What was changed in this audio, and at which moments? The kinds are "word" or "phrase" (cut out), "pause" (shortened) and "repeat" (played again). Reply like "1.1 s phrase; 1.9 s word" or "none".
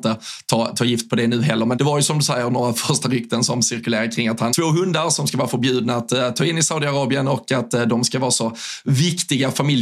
1.7 s word; 4.5 s word